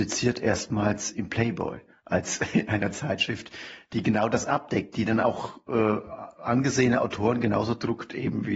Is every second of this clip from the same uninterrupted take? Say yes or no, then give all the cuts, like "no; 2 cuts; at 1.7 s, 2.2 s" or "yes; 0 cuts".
yes; 0 cuts